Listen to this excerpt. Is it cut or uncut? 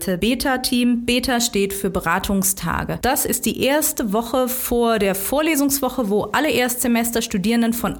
uncut